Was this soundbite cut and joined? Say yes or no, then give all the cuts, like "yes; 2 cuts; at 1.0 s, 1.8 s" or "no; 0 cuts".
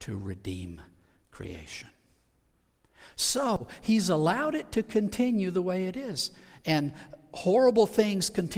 no; 0 cuts